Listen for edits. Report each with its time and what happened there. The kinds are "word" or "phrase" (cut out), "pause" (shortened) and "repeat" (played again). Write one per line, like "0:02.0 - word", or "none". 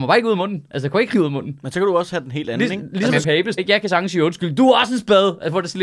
0:01.1 - word
0:03.2 - word
0:03.6 - word